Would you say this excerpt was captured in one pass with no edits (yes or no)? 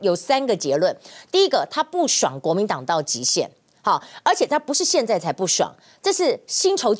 yes